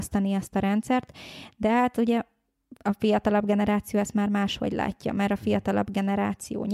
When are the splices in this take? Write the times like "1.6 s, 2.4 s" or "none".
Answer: 2.8 s